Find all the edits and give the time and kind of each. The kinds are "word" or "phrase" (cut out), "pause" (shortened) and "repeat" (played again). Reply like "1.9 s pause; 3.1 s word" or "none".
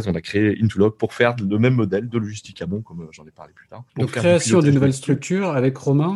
3.9 s pause